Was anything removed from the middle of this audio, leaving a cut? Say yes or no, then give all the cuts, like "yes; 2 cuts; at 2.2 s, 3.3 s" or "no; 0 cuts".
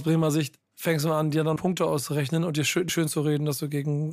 yes; 2 cuts; at 1.6 s, 2.9 s